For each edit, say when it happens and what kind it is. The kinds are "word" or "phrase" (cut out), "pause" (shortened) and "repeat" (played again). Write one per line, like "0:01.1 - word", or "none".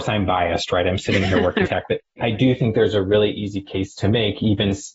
0:01.7 - phrase